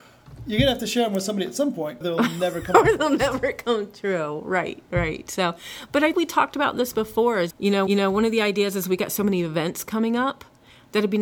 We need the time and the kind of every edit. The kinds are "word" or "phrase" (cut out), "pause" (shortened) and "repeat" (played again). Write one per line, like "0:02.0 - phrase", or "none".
0:02.0 - word
0:06.1 - word
0:07.5 - word
0:07.9 - repeat